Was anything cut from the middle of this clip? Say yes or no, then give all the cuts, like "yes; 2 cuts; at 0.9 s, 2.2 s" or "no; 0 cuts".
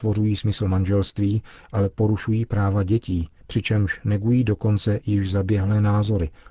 no; 0 cuts